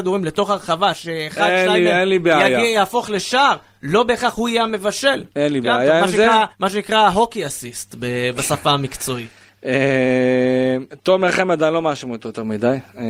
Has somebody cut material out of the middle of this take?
yes; 2 cuts; at 5.3 s, 6.5 s

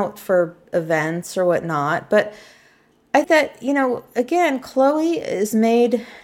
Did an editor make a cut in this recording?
yes; 1 cut; at 3.2 s

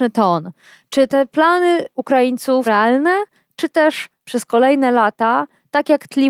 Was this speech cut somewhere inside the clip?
yes; 2 cuts; at 2.6 s, 4.2 s

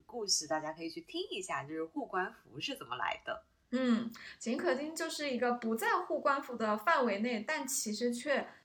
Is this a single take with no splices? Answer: yes; 0 cuts

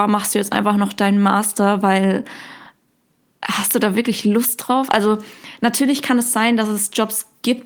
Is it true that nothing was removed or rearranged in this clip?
yes; 0 cuts

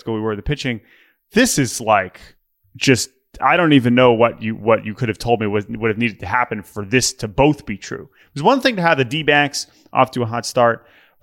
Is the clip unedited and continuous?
yes; 0 cuts

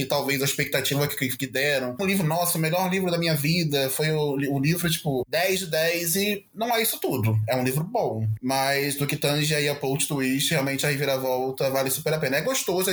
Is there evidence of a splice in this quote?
yes; 1 cut; at 2.0 s

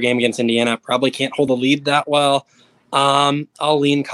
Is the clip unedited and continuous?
yes; 0 cuts

